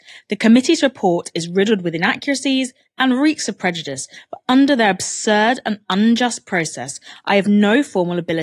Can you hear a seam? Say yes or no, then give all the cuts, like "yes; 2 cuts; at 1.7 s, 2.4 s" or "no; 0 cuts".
no; 0 cuts